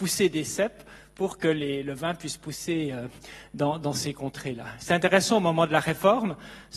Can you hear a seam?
no; 0 cuts

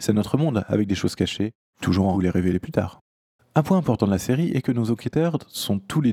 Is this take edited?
yes; 2 cuts; at 1.8 s, 2.1 s

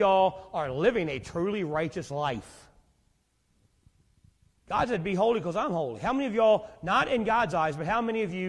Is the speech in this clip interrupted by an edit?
no; 0 cuts

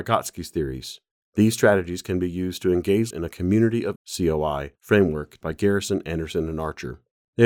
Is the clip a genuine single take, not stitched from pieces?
no; 3 cuts; at 3.1 s, 4.0 s, 5.4 s

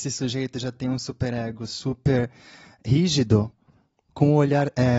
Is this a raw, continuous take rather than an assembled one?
yes; 0 cuts

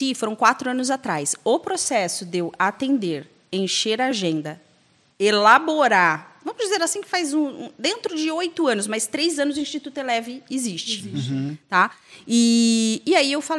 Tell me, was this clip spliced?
no; 0 cuts

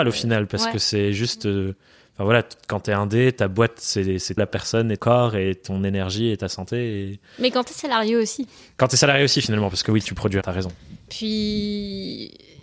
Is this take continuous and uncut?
no; 3 cuts; at 4.4 s, 5.0 s, 10.4 s

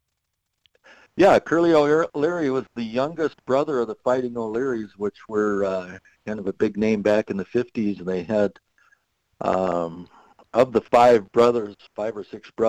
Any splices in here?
no; 0 cuts

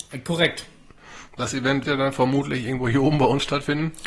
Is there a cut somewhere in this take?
yes; 1 cut; at 1.8 s

